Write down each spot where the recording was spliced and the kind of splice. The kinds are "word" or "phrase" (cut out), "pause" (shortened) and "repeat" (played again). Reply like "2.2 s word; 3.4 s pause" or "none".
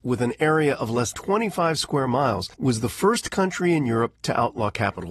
1.1 s word; 2.5 s pause